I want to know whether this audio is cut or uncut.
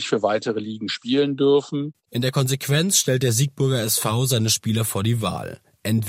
uncut